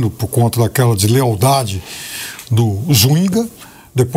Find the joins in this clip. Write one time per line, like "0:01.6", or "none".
none